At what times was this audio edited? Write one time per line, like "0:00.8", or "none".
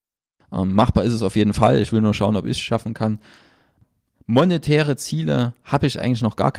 none